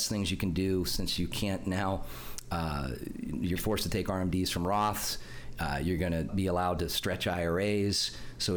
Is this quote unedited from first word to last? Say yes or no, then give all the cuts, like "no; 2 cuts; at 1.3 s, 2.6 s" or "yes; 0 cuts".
no; 2 cuts; at 3.6 s, 6.3 s